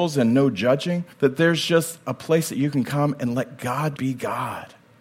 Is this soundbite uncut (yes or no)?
no